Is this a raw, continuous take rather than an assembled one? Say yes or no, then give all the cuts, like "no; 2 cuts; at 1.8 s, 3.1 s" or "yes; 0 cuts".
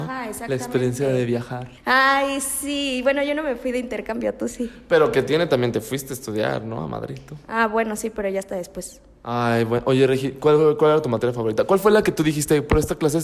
no; 1 cut; at 1.8 s